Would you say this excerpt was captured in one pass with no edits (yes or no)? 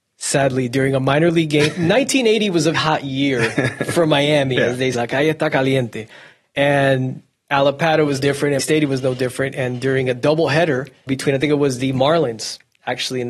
no